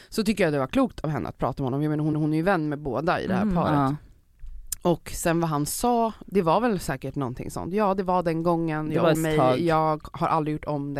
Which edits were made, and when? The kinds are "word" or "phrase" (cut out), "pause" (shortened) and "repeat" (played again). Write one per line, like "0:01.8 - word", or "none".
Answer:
0:02.1 - repeat
0:06.2 - word
0:09.1 - word